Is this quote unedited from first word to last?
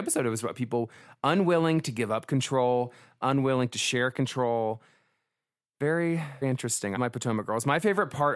no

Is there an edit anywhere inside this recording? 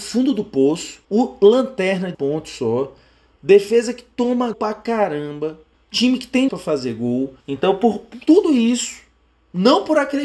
yes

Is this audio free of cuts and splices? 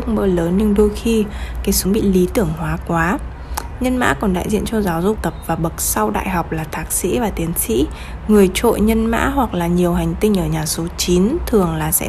no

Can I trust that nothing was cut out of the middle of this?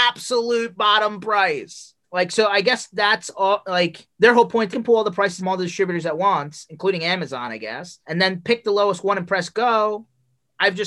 no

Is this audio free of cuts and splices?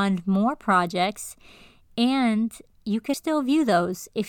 no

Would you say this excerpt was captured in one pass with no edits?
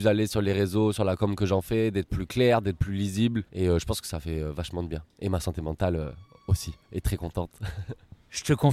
no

